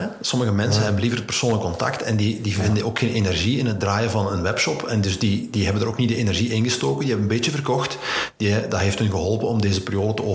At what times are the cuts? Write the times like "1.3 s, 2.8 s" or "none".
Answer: none